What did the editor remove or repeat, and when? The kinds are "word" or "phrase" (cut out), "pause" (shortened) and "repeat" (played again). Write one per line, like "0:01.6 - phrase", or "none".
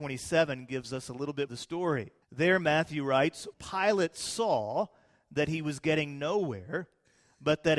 0:01.5 - phrase
0:02.2 - pause
0:03.5 - word